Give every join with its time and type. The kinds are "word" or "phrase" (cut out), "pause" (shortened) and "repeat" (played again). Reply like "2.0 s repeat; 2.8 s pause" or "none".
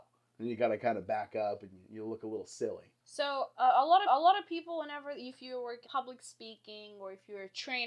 3.0 s pause; 4.1 s repeat; 5.8 s word